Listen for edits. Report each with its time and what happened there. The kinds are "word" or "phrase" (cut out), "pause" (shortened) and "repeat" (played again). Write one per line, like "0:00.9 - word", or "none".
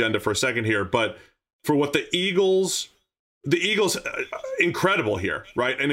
none